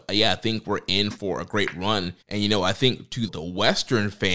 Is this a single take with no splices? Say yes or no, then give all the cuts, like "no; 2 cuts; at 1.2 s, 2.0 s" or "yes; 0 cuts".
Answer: no; 2 cuts; at 2.2 s, 3.3 s